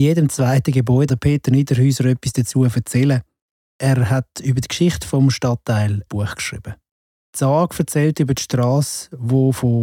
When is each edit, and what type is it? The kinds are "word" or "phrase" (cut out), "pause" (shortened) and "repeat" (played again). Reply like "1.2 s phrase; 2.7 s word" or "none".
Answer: 1.1 s word; 6.1 s word